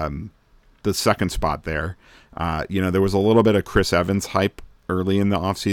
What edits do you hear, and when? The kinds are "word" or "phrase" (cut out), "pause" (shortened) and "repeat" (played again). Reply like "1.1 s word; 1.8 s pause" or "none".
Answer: none